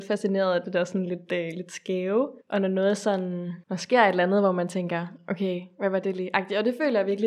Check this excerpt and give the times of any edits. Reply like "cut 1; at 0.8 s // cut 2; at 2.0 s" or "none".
cut 1; at 2.4 s // cut 2; at 3.6 s